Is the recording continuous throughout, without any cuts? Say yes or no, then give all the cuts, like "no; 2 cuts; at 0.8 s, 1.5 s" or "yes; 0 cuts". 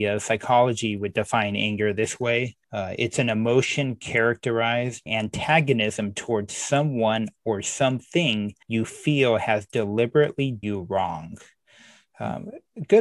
no; 4 cuts; at 2.6 s, 5.1 s, 8.6 s, 10.6 s